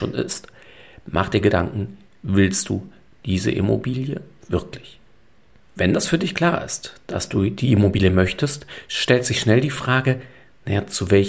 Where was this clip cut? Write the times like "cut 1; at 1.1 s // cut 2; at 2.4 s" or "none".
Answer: none